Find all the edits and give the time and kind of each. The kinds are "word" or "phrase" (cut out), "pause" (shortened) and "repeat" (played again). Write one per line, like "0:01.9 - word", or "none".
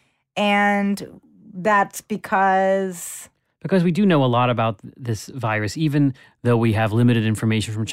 none